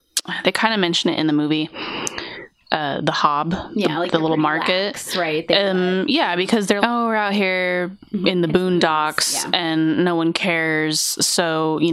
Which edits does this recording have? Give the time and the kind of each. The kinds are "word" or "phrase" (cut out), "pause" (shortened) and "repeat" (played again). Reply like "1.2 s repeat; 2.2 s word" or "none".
6.8 s word